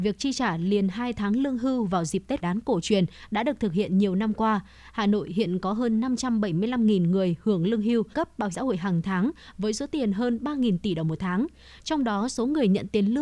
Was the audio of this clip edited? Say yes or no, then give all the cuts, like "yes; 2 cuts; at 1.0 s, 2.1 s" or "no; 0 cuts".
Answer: yes; 3 cuts; at 2.4 s, 8.1 s, 8.5 s